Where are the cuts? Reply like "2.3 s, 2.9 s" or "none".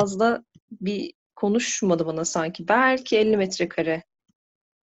1.3 s

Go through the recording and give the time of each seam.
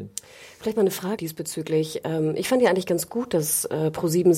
1.2 s

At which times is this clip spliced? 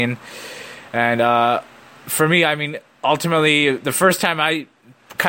none

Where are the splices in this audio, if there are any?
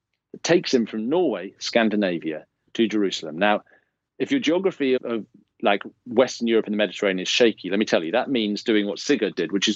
5.0 s

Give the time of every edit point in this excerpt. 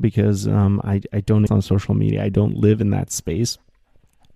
1.5 s

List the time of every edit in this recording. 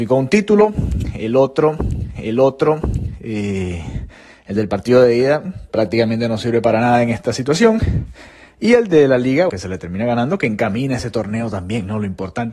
2.2 s, 9.5 s

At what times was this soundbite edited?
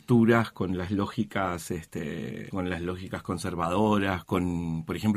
2.5 s, 4.2 s

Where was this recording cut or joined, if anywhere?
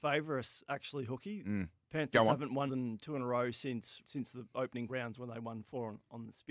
2.7 s, 4.0 s, 4.9 s

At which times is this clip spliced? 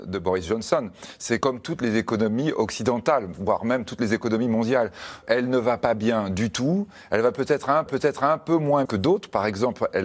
1.4 s, 5.2 s, 7.9 s, 8.9 s

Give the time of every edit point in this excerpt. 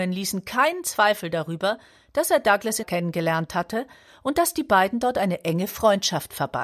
2.8 s

